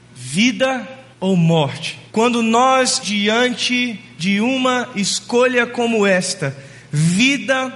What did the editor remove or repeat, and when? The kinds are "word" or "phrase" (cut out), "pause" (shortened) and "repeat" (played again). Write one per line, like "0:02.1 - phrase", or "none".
0:01.1 - pause
0:02.1 - pause
0:03.0 - word